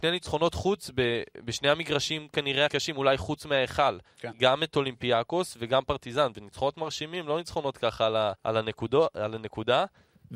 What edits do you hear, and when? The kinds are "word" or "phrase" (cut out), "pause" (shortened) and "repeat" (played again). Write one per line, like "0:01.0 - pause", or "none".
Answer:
0:02.7 - word
0:08.4 - pause